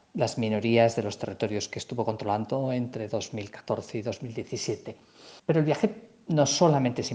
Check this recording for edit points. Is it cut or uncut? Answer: cut